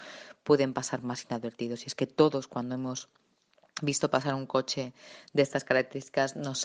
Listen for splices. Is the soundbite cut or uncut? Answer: uncut